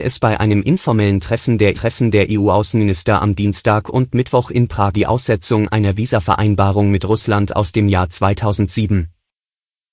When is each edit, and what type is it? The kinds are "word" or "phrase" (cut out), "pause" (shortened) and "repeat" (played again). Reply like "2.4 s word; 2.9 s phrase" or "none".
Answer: 1.7 s repeat; 4.9 s word